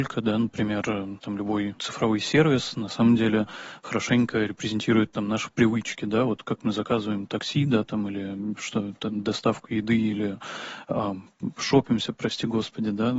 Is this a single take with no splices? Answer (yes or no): yes